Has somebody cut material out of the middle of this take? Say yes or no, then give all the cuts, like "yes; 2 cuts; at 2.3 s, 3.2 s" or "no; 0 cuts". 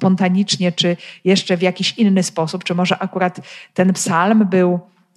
no; 0 cuts